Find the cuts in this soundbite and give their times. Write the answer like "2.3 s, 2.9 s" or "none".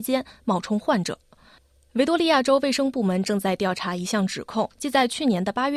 4.7 s